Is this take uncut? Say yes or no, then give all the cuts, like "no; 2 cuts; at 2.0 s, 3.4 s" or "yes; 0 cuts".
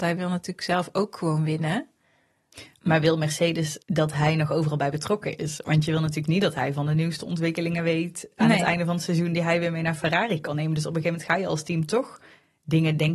no; 1 cut; at 3.8 s